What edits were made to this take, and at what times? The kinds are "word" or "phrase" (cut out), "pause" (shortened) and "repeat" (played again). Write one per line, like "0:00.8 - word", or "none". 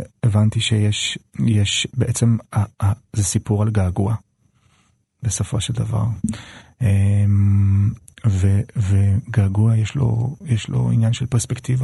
none

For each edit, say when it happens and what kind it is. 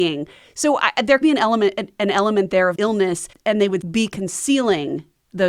0:01.2 - word
0:02.8 - word
0:03.3 - pause
0:03.8 - word

